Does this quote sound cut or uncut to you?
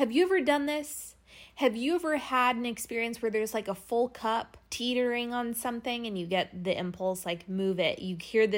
cut